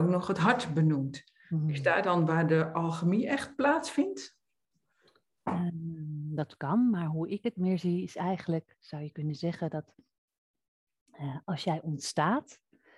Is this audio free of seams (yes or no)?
yes